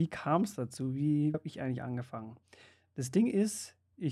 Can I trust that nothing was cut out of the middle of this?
no; 1 cut; at 1.3 s

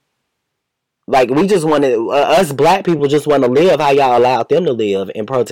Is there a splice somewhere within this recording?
no; 0 cuts

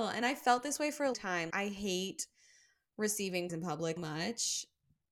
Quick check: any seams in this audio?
yes; 4 cuts; at 1.1 s, 1.5 s, 3.5 s, 4.0 s

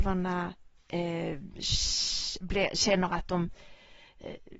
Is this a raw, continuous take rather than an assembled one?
yes; 0 cuts

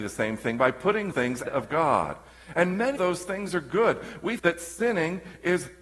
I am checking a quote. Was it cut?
yes; 4 cuts; at 1.1 s, 1.4 s, 3.0 s, 4.4 s

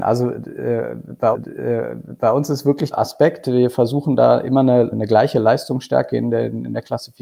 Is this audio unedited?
no; 3 cuts; at 1.3 s, 2.9 s, 4.9 s

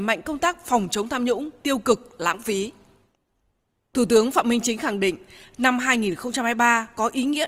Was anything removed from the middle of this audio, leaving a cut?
no; 0 cuts

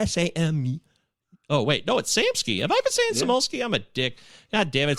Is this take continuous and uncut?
yes; 0 cuts

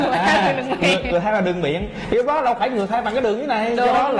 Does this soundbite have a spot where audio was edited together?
no; 0 cuts

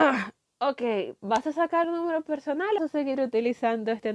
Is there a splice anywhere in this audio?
yes; 2 cuts; at 1.8 s, 2.8 s

